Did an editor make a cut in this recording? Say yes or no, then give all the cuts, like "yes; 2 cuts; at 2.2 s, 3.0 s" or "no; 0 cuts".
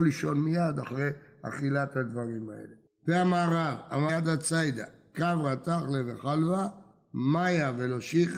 yes; 1 cut; at 4.1 s